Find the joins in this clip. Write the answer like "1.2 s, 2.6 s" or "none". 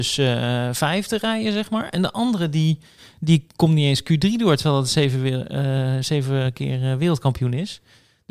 none